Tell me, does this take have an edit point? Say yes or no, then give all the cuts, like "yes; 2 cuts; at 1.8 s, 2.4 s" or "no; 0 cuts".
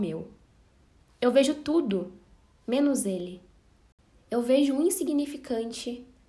no; 0 cuts